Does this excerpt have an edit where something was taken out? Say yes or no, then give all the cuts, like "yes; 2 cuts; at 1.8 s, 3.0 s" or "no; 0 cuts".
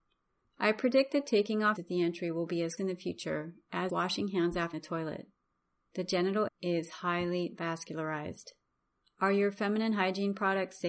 yes; 6 cuts; at 1.8 s, 2.8 s, 3.9 s, 4.7 s, 5.6 s, 6.5 s